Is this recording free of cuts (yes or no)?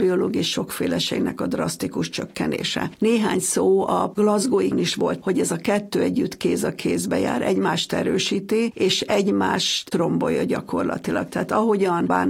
no